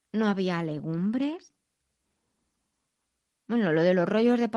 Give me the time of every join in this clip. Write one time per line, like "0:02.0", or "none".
none